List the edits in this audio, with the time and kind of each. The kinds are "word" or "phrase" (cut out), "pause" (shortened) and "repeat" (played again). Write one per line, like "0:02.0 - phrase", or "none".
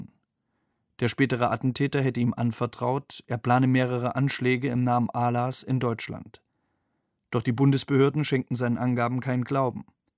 none